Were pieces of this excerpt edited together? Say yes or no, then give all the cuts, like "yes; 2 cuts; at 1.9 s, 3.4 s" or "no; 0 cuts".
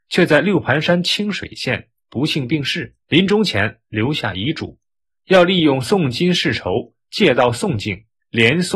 yes; 1 cut; at 3.0 s